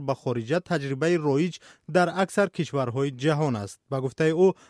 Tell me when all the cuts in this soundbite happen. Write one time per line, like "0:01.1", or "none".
none